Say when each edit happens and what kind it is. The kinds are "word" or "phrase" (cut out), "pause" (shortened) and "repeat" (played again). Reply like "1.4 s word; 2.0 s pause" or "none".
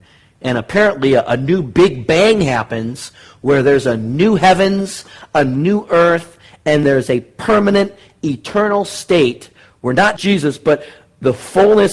6.8 s word; 10.2 s word